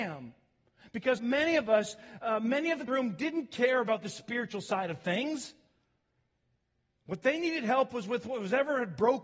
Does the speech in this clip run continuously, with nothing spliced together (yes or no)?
no